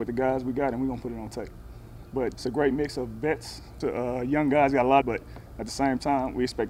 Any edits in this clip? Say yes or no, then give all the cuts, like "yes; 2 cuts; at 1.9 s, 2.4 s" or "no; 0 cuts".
yes; 3 cuts; at 2.3 s, 3.8 s, 5.0 s